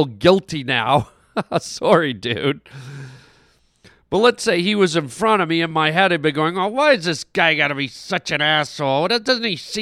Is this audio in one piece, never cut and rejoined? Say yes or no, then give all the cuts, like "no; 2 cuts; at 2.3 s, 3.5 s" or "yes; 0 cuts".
yes; 0 cuts